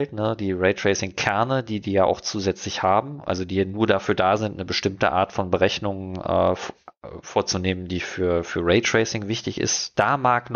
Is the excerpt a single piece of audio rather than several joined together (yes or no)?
yes